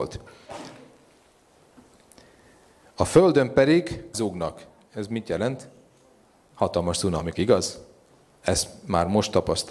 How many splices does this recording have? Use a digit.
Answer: 2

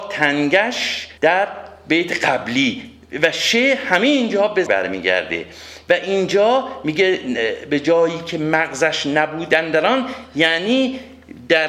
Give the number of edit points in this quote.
2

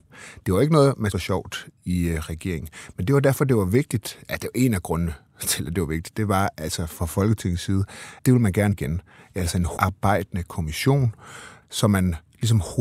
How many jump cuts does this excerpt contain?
6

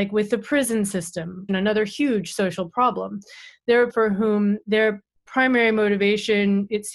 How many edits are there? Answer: 2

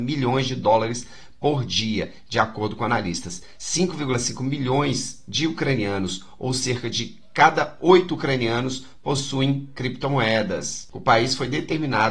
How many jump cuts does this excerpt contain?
0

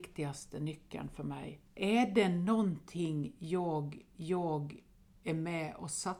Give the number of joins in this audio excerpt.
2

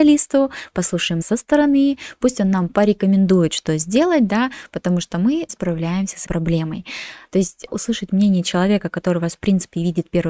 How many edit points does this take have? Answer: 4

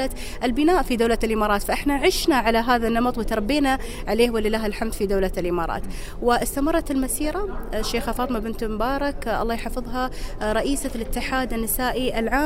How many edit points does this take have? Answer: 0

